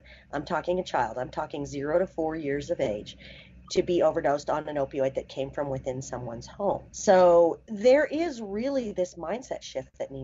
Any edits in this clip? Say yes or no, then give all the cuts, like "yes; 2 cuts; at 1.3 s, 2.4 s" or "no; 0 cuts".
no; 0 cuts